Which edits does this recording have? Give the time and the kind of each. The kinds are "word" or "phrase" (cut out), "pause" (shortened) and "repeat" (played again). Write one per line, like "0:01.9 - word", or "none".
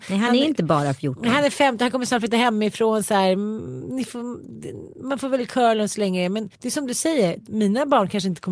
0:06.5 - pause